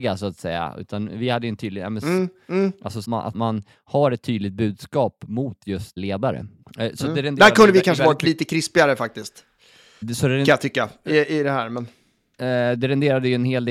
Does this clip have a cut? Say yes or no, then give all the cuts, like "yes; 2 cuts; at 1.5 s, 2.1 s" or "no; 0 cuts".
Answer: yes; 5 cuts; at 3.0 s, 3.3 s, 6.0 s, 6.6 s, 10.0 s